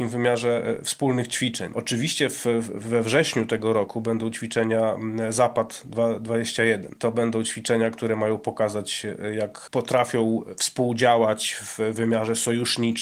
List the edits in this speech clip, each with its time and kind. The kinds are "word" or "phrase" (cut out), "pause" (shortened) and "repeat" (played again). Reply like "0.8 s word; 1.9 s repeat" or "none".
none